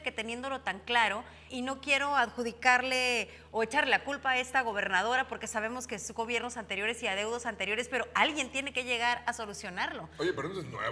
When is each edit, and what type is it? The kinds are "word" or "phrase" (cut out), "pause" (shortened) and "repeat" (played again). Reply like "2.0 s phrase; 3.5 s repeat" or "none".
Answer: 1.5 s word